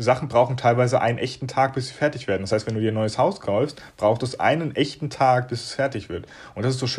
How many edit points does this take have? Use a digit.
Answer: 0